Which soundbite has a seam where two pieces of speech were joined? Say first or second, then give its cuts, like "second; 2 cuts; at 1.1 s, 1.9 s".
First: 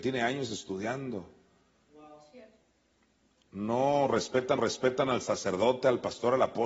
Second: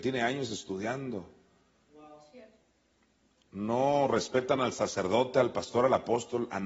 first; 1 cut; at 4.6 s